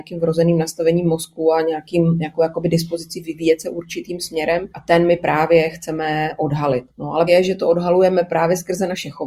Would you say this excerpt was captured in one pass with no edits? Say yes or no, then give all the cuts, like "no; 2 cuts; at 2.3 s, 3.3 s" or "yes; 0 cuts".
no; 3 cuts; at 4.7 s, 6.9 s, 7.3 s